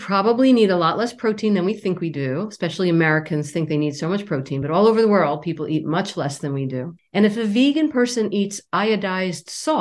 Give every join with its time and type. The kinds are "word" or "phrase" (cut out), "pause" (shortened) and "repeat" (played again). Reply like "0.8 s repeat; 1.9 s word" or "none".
none